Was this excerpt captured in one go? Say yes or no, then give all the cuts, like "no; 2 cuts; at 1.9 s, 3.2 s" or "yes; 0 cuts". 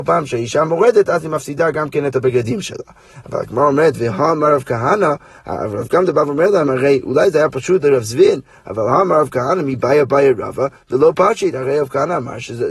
yes; 0 cuts